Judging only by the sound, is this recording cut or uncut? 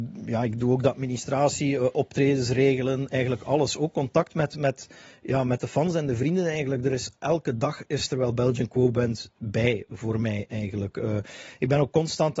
uncut